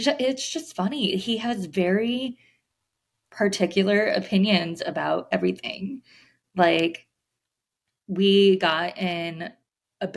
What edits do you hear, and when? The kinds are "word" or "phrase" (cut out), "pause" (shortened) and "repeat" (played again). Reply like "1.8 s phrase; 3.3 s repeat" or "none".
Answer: 5.3 s word